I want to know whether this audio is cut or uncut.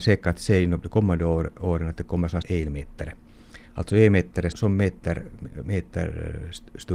cut